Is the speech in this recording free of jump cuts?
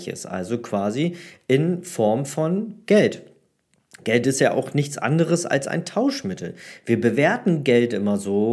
yes; 0 cuts

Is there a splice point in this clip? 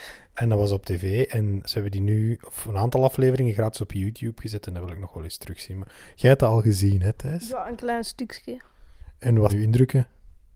yes; 2 cuts; at 1.6 s, 9.5 s

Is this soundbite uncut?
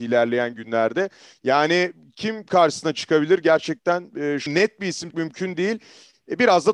no; 2 cuts; at 4.5 s, 5.1 s

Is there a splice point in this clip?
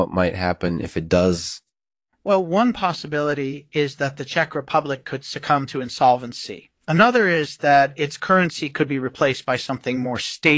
no; 0 cuts

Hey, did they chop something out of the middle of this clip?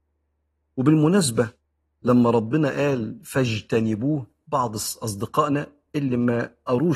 no; 0 cuts

